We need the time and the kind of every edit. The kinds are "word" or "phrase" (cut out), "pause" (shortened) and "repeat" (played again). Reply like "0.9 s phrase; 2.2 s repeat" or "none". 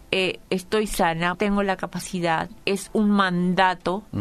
1.3 s word; 2.6 s word